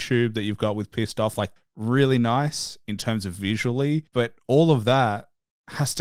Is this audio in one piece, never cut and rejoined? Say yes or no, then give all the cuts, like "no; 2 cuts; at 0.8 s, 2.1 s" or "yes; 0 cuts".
no; 2 cuts; at 1.6 s, 4.1 s